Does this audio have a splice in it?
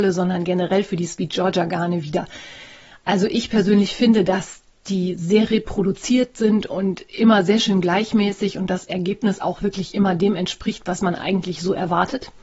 no; 0 cuts

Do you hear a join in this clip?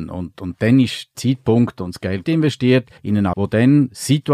yes; 4 cuts; at 1.1 s, 2.2 s, 3.0 s, 3.3 s

